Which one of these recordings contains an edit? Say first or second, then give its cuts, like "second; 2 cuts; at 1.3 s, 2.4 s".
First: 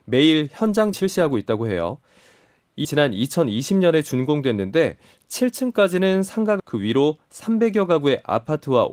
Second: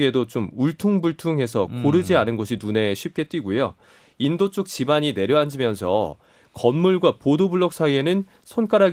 first; 3 cuts; at 0.9 s, 2.8 s, 6.6 s